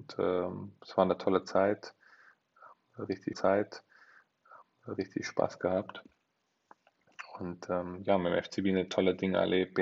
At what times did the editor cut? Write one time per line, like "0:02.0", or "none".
0:03.3